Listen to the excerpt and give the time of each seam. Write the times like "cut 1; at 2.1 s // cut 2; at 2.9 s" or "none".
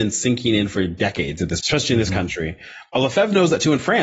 cut 1; at 1.6 s